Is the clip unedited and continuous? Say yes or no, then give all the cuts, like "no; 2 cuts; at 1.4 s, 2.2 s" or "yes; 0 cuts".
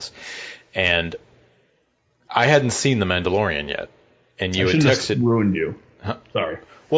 yes; 0 cuts